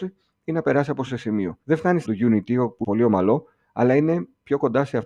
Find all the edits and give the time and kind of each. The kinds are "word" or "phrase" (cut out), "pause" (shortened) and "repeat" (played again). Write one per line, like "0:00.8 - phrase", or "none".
0:01.1 - word
0:01.6 - pause
0:02.0 - word
0:02.8 - phrase